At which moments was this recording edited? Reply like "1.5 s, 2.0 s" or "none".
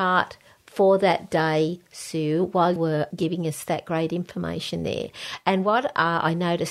2.8 s